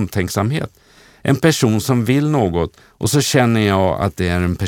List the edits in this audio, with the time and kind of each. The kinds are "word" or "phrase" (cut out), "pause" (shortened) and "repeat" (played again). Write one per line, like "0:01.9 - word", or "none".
0:02.8 - pause